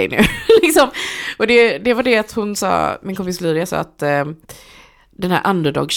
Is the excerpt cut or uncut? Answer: uncut